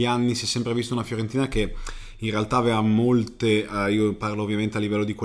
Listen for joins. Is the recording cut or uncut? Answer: uncut